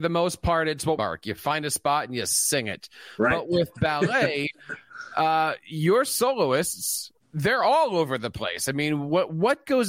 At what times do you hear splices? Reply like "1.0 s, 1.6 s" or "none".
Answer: 1.0 s, 7.2 s